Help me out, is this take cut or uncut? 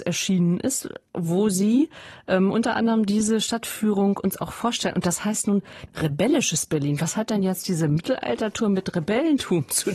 uncut